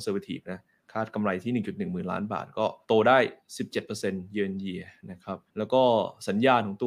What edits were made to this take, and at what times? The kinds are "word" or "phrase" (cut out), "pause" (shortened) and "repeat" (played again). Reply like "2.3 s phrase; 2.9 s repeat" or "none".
2.8 s pause; 5.5 s pause